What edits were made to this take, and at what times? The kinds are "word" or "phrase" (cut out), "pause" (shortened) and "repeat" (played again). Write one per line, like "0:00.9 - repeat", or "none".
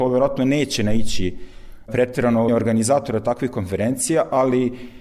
0:01.9 - word
0:02.5 - word